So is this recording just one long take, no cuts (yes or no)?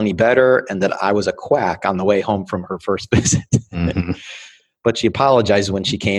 yes